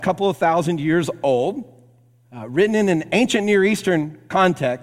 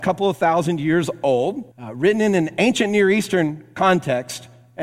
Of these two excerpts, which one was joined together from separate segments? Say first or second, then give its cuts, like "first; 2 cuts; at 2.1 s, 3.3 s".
second; 1 cut; at 1.7 s